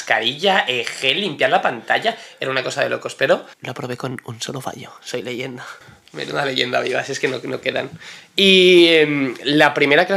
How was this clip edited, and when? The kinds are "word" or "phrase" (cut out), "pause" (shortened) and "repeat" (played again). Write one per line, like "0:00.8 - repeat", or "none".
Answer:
0:03.5 - pause
0:05.8 - pause